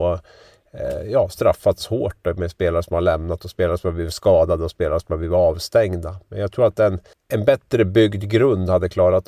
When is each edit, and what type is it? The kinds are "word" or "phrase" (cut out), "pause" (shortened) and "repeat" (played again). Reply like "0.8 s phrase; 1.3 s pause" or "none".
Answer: 7.1 s pause